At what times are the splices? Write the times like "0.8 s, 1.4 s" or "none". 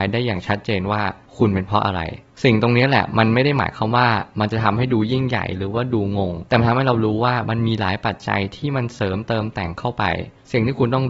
6.5 s